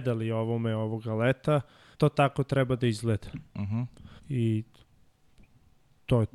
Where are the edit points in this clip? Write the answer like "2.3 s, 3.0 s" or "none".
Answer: 1.9 s, 4.2 s